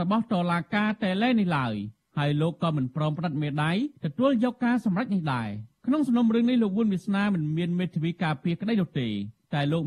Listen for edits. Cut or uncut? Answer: cut